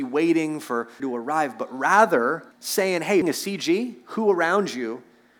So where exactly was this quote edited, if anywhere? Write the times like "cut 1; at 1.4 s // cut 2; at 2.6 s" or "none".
cut 1; at 1.0 s // cut 2; at 2.5 s // cut 3; at 3.2 s